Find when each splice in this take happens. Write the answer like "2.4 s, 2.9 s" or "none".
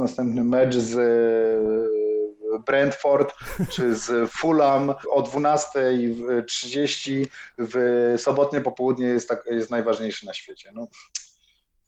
none